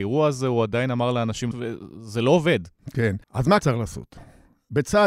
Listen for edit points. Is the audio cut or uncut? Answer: cut